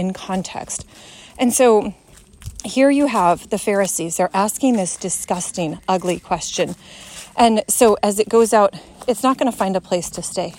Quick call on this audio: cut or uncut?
uncut